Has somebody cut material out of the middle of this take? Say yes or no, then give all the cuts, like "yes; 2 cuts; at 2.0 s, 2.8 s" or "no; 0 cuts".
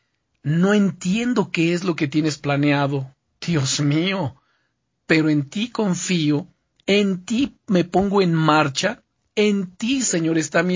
no; 0 cuts